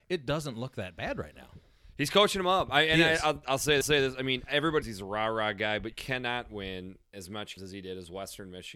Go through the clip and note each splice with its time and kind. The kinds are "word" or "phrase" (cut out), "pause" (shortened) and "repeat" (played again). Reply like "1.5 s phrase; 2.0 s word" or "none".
3.8 s repeat; 4.8 s word; 5.9 s word; 7.1 s pause; 7.6 s word